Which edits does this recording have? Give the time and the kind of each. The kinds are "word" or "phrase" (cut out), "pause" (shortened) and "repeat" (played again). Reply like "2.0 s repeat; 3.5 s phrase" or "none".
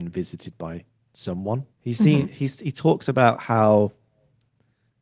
1.7 s pause

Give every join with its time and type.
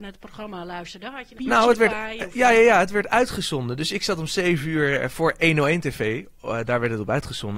1.4 s phrase

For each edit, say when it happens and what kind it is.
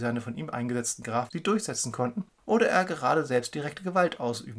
2.3 s pause

